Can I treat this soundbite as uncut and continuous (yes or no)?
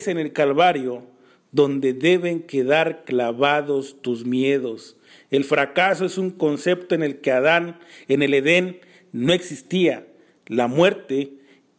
yes